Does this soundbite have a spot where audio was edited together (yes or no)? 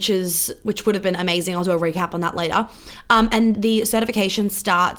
yes